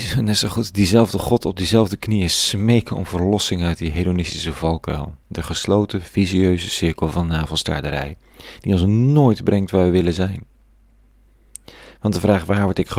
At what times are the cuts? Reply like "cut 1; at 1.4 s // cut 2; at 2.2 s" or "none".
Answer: cut 1; at 5.2 s